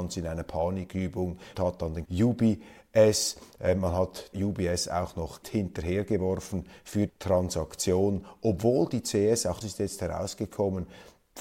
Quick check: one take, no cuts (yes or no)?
no